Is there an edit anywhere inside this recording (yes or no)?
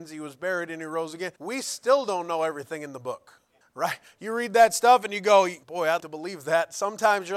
yes